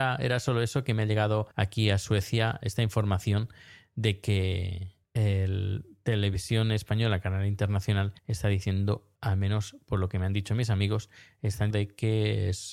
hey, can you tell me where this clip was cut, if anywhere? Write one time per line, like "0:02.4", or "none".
0:01.5
0:02.6
0:05.0
0:08.2
0:09.1
0:11.7